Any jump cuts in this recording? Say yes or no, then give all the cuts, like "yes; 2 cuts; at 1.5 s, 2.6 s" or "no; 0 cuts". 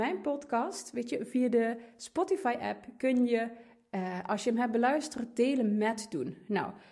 no; 0 cuts